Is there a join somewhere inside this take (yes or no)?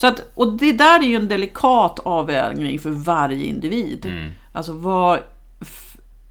no